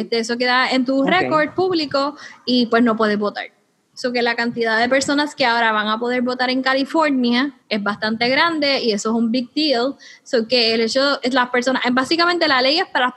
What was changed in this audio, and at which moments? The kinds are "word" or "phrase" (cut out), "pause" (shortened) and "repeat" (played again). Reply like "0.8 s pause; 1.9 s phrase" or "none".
7.6 s pause